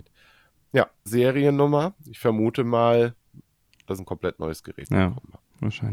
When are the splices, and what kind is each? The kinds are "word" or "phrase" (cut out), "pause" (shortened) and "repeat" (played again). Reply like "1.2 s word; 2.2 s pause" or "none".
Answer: 1.1 s word; 4.0 s phrase